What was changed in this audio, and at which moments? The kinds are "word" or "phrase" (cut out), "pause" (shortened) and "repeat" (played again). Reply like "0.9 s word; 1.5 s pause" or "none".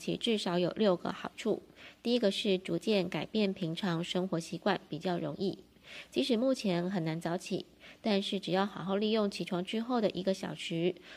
none